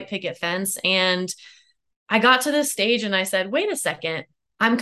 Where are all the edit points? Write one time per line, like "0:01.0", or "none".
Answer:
none